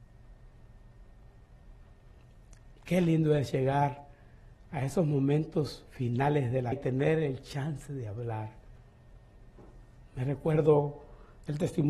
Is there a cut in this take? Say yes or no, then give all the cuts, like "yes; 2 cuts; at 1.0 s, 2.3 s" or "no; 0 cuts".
yes; 2 cuts; at 2.7 s, 6.7 s